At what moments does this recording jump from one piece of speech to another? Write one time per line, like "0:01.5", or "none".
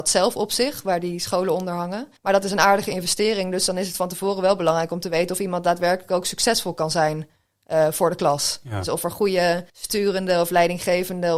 0:02.2
0:09.7